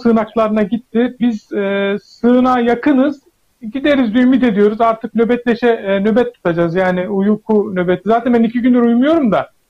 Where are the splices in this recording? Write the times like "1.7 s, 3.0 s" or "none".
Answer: none